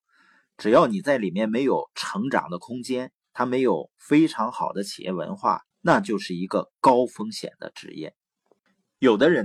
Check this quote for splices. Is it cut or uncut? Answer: cut